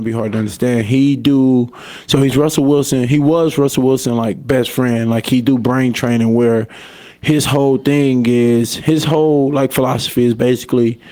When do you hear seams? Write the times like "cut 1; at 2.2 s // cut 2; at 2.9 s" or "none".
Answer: none